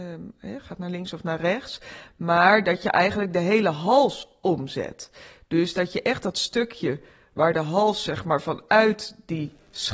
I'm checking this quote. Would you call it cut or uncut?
uncut